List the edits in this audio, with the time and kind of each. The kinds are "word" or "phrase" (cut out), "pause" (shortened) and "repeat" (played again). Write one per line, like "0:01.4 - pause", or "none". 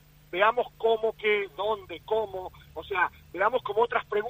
0:01.1 - word